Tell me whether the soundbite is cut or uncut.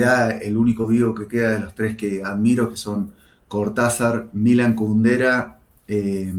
uncut